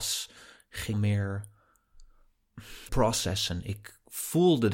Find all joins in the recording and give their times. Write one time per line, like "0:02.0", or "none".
0:00.9
0:02.9